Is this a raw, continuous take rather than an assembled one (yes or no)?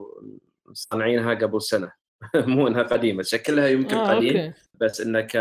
yes